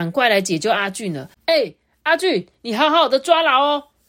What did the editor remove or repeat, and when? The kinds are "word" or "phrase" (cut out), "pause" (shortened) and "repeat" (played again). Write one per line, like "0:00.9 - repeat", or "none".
0:01.4 - pause